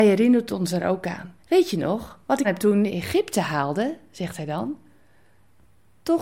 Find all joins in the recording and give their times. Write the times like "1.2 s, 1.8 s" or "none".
1.4 s, 2.4 s, 2.9 s